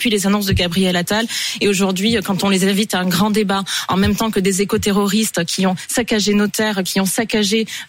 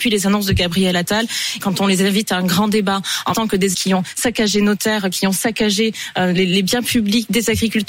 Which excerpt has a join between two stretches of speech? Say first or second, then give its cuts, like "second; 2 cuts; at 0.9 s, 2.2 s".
second; 3 cuts; at 1.6 s, 3.3 s, 3.7 s